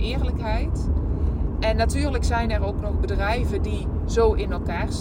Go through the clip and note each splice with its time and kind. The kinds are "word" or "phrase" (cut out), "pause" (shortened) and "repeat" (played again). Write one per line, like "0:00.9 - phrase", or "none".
none